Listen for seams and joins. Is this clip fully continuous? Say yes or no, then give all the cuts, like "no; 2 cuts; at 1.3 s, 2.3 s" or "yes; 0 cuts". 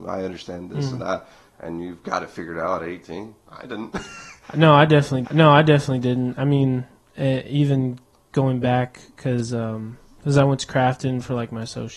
no; 3 cuts; at 5.2 s, 8.1 s, 10.2 s